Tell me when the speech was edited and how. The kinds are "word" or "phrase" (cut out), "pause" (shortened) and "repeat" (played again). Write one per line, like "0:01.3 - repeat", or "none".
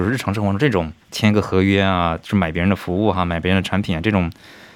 0:01.0 - pause